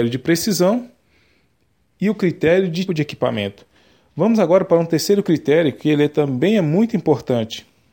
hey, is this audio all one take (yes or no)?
no